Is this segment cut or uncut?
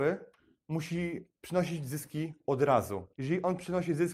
cut